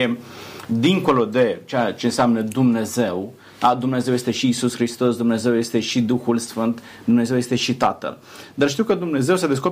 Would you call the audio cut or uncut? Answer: uncut